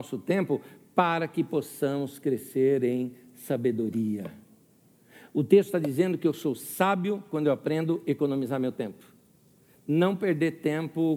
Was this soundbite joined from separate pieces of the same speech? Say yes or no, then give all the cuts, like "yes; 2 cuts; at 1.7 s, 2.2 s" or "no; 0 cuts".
no; 0 cuts